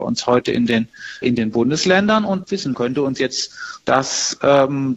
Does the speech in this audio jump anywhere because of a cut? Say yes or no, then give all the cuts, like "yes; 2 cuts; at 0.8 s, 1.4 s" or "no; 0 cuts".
yes; 4 cuts; at 1.2 s, 2.4 s, 2.7 s, 3.8 s